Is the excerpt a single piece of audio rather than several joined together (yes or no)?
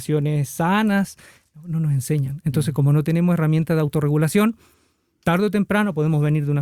yes